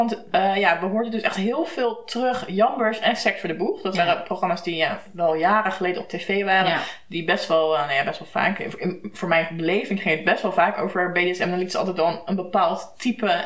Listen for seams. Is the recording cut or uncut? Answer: uncut